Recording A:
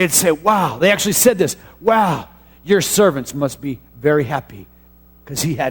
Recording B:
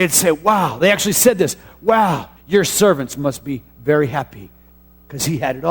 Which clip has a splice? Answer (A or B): B